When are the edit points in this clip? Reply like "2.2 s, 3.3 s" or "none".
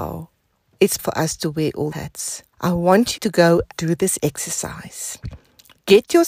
1.0 s, 1.9 s, 2.5 s, 3.2 s, 3.7 s